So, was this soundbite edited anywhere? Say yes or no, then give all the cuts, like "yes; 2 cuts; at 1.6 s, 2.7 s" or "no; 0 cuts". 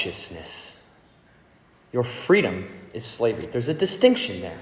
no; 0 cuts